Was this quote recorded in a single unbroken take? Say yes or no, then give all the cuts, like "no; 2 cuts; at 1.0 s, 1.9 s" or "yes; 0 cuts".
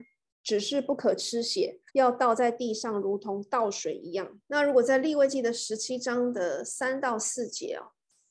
no; 2 cuts; at 1.9 s, 4.4 s